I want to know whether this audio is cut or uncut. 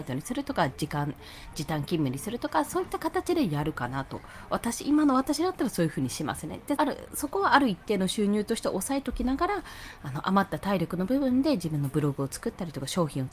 cut